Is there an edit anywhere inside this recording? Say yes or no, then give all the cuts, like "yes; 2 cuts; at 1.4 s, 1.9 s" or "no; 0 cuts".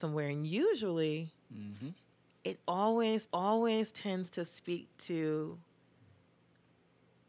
yes; 2 cuts; at 1.4 s, 3.3 s